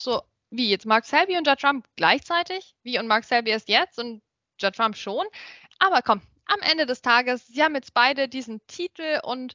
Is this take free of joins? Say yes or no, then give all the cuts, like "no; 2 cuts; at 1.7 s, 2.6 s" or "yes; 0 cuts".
yes; 0 cuts